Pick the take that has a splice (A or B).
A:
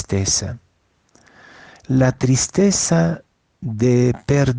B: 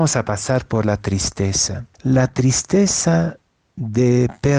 B